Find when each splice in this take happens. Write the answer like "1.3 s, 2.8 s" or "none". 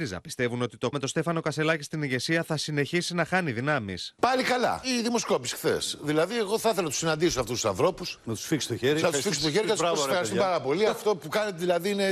0.9 s, 8.2 s